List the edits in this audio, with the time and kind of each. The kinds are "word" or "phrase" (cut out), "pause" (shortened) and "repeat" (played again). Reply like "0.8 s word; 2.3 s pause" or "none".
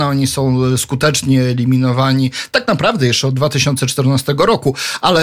none